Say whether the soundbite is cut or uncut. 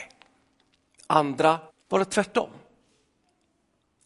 cut